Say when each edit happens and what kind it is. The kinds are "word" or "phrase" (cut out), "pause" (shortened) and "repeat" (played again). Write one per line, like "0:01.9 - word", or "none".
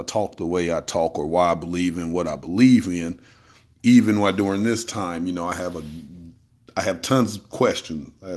none